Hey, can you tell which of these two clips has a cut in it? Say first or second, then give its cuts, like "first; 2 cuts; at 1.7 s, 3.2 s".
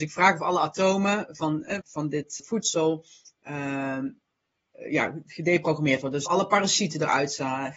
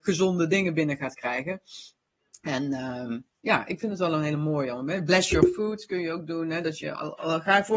first; 3 cuts; at 1.8 s, 2.4 s, 6.3 s